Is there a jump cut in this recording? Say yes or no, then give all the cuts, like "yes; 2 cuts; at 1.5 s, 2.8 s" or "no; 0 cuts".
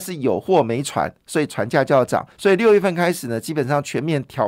yes; 1 cut; at 2.3 s